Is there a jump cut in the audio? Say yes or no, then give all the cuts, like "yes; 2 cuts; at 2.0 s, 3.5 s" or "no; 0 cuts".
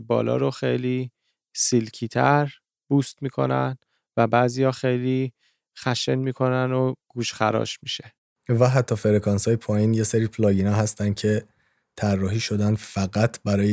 no; 0 cuts